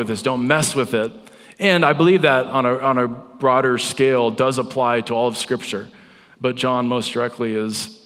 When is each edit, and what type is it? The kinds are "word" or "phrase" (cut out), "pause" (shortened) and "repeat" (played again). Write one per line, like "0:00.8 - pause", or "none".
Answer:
none